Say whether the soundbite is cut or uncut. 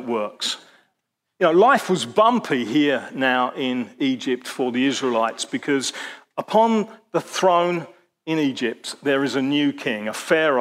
uncut